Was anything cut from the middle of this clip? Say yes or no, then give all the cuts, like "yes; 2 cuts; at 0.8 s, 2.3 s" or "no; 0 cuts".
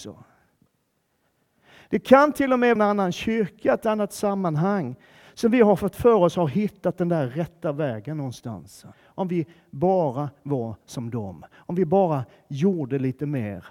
yes; 2 cuts; at 2.8 s, 8.9 s